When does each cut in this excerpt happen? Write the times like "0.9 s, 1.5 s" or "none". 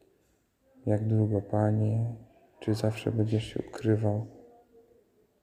none